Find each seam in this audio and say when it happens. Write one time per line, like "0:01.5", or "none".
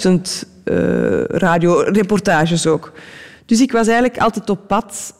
none